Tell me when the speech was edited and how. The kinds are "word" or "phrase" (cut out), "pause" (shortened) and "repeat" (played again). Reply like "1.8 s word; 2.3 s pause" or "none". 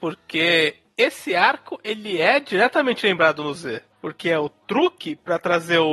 none